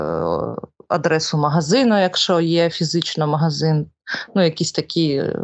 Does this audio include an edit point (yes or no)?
no